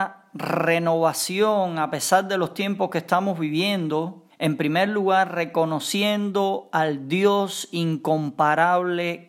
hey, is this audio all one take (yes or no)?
no